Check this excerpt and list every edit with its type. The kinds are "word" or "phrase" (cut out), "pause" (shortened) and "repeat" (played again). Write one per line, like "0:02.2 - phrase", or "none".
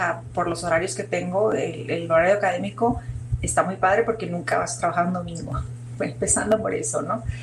none